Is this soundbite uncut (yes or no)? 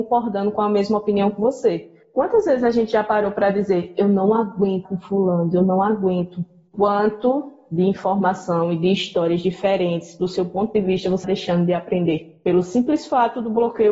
no